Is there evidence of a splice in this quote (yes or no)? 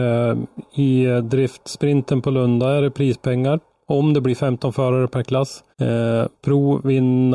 yes